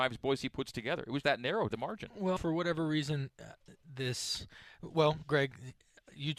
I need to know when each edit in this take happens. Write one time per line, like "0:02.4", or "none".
0:01.2
0:01.7
0:02.4